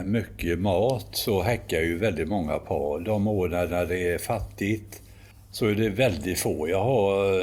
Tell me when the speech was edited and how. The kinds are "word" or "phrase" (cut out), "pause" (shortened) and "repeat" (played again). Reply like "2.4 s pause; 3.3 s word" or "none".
3.7 s repeat